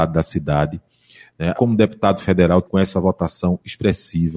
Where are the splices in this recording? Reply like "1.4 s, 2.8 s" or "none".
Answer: 1.5 s, 2.6 s